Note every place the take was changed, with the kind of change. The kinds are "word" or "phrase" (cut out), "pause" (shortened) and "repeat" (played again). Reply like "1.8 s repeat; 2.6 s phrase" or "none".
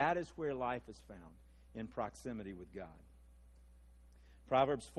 none